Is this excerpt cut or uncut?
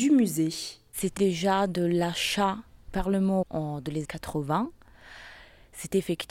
cut